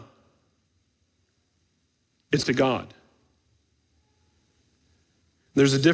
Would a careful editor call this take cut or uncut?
cut